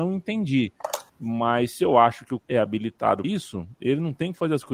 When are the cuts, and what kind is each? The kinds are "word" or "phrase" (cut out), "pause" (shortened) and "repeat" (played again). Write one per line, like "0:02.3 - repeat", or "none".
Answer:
0:01.1 - pause
0:02.4 - word
0:03.2 - word